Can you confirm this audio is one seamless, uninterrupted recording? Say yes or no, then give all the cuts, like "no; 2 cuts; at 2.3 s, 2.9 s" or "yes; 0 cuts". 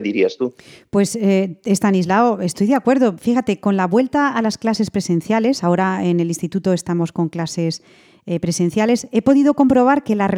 yes; 0 cuts